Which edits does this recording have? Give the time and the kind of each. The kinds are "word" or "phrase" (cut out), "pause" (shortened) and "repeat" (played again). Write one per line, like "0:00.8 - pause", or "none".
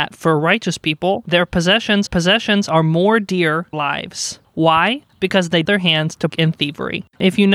0:02.1 - repeat
0:03.7 - phrase
0:05.7 - phrase
0:06.3 - word